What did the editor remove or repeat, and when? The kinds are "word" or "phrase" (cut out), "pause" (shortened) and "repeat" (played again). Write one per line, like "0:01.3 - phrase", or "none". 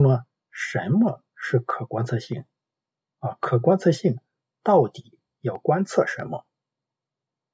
none